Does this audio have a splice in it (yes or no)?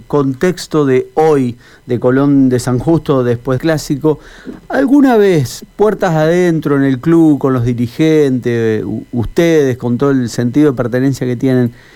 yes